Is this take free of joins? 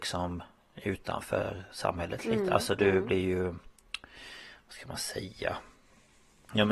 yes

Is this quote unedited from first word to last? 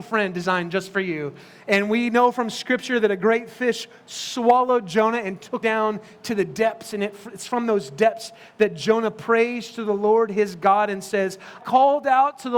no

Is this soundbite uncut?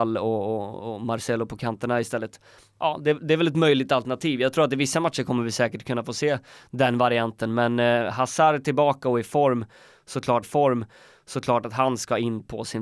no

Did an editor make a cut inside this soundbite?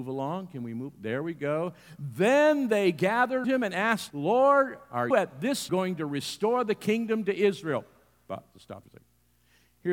yes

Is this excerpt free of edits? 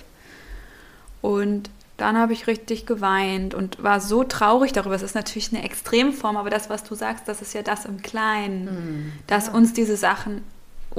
yes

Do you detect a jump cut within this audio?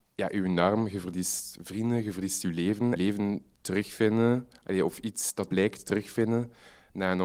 yes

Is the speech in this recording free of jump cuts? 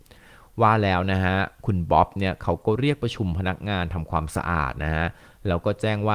yes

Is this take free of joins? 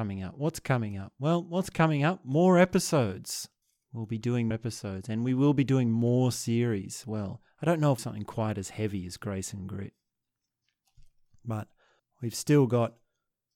no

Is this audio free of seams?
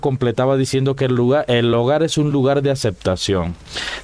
yes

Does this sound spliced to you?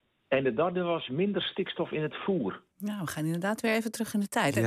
no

